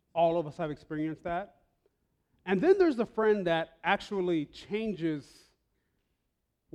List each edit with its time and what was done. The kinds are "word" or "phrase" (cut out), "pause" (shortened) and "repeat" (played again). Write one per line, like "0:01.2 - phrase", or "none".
none